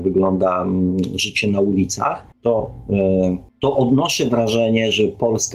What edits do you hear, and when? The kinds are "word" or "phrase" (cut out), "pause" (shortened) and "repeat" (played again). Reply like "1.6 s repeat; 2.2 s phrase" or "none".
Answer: none